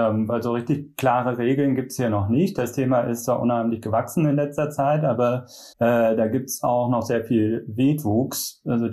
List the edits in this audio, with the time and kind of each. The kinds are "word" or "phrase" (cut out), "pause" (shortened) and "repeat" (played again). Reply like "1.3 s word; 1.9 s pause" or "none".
5.7 s pause